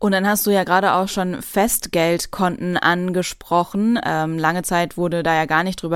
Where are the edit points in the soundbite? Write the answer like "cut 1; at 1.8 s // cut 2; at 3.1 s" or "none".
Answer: none